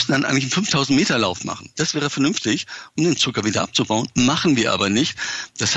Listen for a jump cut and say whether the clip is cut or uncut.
uncut